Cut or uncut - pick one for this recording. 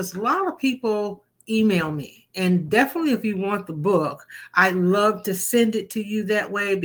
uncut